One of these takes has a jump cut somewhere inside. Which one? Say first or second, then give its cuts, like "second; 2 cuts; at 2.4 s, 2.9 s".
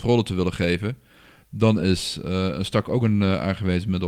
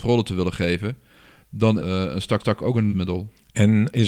second; 3 cuts; at 1.8 s, 2.4 s, 2.9 s